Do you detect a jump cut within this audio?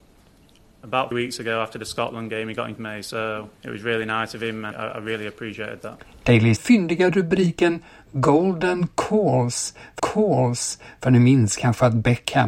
yes; 6 cuts; at 1.1 s, 2.8 s, 3.5 s, 4.7 s, 6.6 s, 10.0 s

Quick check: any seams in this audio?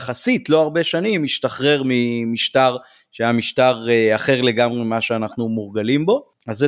no; 0 cuts

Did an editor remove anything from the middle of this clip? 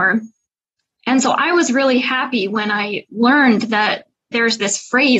no; 0 cuts

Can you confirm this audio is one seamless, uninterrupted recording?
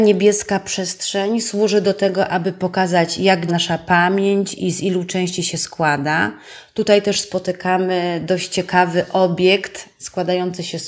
no; 1 cut; at 3.5 s

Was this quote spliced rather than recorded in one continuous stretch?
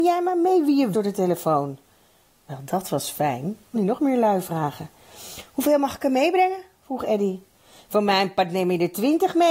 yes; 2 cuts; at 0.9 s, 3.7 s

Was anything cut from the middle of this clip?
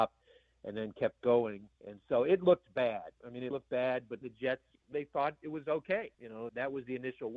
yes; 7 cuts; at 1.7 s, 3.1 s, 3.5 s, 4.2 s, 4.9 s, 6.1 s, 6.5 s

